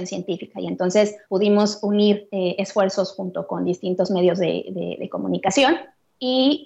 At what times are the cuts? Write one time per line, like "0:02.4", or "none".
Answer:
0:01.2